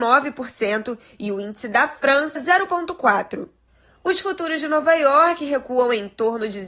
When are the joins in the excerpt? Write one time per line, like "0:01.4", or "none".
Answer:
0:02.4